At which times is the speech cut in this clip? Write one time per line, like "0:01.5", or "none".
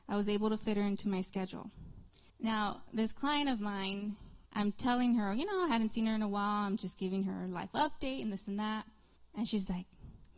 0:02.3
0:04.5
0:09.2

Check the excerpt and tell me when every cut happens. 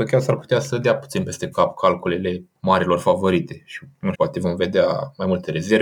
0:04.1

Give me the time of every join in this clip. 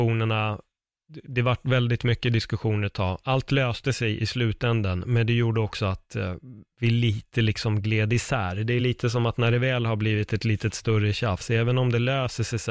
none

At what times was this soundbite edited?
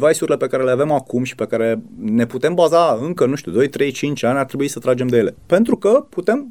none

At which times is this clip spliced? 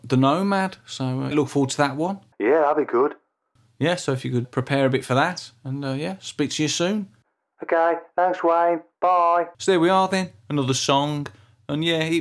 0:01.3
0:02.3
0:04.4
0:09.5

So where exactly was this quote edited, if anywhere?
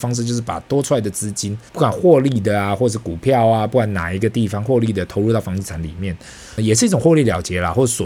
0:01.7
0:06.6

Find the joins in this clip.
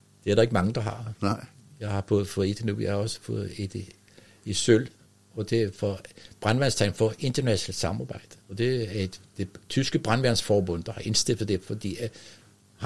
0:08.4

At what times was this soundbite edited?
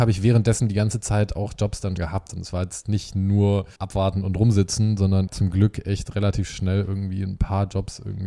0:02.0
0:03.8
0:05.3

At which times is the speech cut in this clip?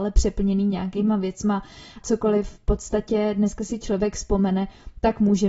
0:02.0

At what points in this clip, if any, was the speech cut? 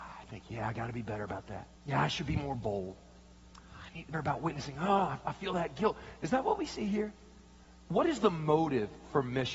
0:01.8
0:04.1

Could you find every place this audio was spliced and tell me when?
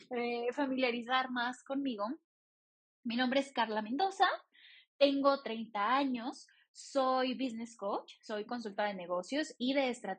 none

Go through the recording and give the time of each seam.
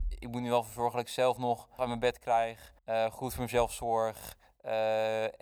0:01.8
0:02.8

